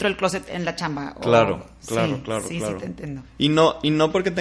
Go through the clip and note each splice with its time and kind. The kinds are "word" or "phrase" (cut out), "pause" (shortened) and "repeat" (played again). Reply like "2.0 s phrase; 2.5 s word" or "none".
none